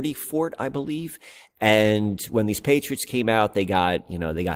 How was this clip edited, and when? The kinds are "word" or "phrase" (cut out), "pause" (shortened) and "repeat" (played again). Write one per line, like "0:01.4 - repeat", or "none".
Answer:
none

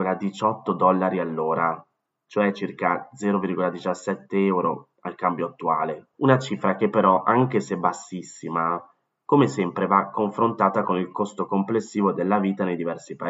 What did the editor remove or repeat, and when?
0:06.1 - pause

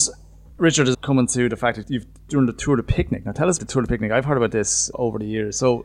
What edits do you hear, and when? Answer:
0:00.9 - word
0:01.8 - word
0:03.6 - word
0:04.9 - word

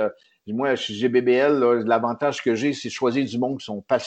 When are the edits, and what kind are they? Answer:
none

